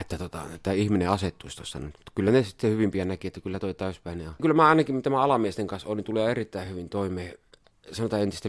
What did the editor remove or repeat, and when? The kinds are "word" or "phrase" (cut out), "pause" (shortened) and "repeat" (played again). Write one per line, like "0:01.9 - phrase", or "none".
none